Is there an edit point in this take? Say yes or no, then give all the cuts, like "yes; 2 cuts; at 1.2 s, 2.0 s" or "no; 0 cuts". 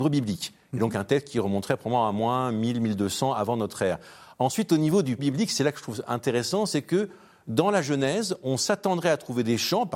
yes; 1 cut; at 5.2 s